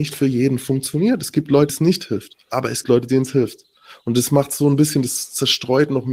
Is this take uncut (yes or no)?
no